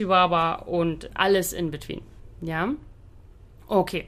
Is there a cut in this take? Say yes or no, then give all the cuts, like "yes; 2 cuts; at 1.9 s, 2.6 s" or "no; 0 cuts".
no; 0 cuts